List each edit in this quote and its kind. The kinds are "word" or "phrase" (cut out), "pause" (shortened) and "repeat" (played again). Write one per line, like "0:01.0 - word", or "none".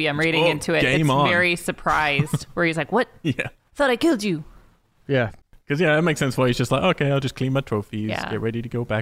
0:05.4 - pause

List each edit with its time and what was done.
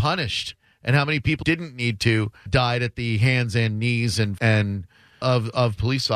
0:01.4 - word
0:02.5 - word
0:04.4 - word
0:05.2 - word

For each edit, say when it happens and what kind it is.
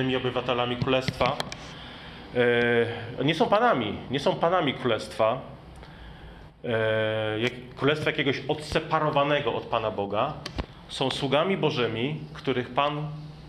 none

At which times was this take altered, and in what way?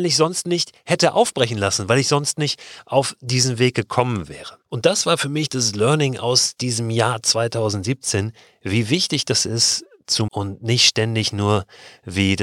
0:10.3 - word

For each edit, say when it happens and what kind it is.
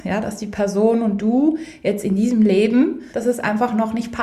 0:03.1 - pause

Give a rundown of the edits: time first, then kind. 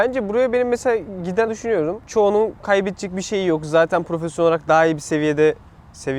0:01.5 - word

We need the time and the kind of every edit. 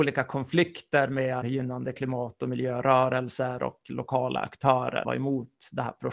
0:01.4 - word
0:05.0 - word

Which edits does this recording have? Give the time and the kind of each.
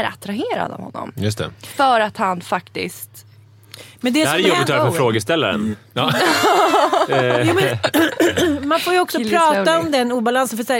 none

